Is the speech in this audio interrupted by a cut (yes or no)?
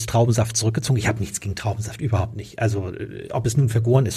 no